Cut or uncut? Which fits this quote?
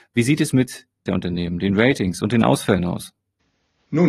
cut